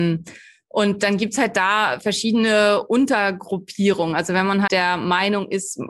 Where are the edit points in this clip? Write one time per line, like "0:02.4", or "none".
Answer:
0:04.7